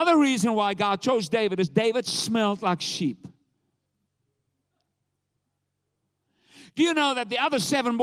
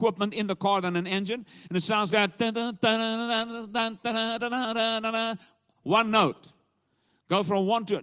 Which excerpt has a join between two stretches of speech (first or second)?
second